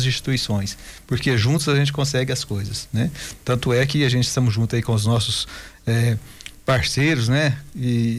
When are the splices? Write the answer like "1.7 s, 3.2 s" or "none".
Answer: none